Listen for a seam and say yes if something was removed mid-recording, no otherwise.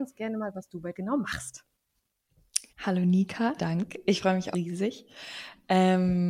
yes